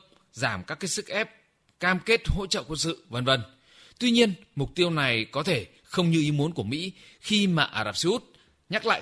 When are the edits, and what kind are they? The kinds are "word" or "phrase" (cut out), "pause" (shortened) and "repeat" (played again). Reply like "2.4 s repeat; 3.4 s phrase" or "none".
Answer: none